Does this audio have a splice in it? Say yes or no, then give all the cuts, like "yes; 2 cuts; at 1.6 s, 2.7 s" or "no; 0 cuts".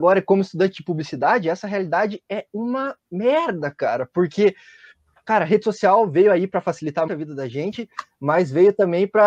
yes; 1 cut; at 7.1 s